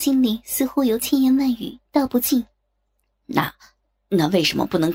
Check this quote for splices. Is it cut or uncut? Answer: cut